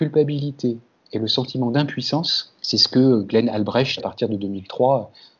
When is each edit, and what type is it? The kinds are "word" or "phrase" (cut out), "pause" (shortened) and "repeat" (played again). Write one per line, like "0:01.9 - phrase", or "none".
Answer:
0:02.6 - pause
0:04.0 - phrase